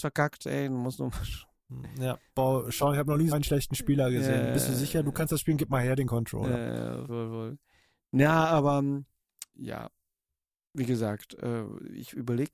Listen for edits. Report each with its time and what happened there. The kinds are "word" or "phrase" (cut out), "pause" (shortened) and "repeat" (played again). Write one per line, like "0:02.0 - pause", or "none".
0:03.3 - word
0:07.1 - word
0:09.5 - word